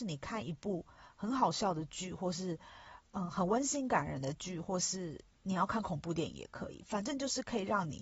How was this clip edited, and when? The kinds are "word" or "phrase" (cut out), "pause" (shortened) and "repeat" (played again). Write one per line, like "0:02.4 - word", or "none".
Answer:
0:05.3 - pause